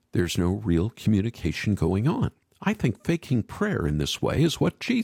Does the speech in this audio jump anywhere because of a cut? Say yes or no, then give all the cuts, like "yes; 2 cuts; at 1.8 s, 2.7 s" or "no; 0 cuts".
yes; 1 cut; at 2.4 s